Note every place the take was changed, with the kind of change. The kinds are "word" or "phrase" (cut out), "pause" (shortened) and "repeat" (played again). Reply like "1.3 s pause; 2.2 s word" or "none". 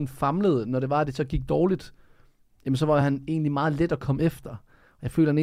none